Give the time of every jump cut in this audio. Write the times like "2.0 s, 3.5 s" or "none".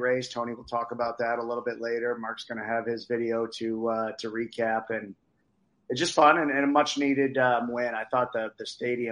none